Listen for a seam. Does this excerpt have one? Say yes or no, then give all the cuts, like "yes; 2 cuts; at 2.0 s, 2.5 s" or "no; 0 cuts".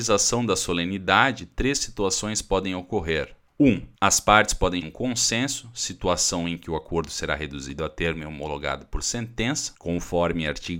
yes; 2 cuts; at 4.0 s, 4.8 s